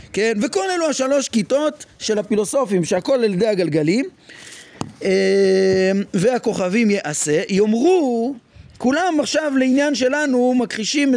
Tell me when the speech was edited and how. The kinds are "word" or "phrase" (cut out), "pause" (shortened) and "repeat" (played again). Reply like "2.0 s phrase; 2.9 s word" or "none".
2.9 s word